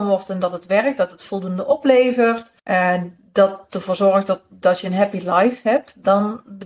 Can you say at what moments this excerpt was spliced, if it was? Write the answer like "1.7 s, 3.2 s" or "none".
2.6 s